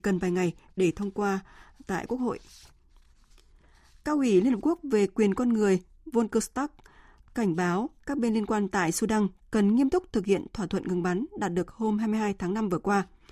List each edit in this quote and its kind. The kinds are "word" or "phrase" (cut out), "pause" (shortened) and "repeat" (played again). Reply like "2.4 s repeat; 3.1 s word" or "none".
none